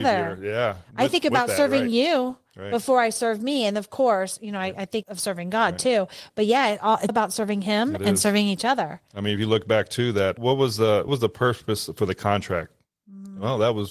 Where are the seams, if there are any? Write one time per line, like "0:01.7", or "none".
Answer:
0:05.0
0:07.1
0:10.4
0:11.1